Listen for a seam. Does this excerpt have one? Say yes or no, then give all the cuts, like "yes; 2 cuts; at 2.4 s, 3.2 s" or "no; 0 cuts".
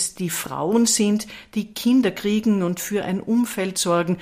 no; 0 cuts